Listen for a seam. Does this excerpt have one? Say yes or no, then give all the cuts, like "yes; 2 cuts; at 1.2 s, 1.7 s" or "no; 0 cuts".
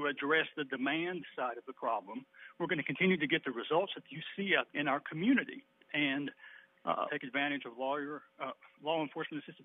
yes; 3 cuts; at 4.7 s, 5.7 s, 7.1 s